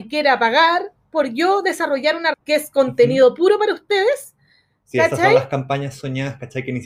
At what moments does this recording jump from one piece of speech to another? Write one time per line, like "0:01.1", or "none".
0:02.3